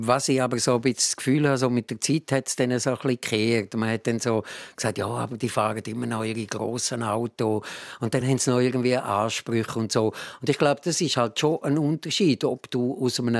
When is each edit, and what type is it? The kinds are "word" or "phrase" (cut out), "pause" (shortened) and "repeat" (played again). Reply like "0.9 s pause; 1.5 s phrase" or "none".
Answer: none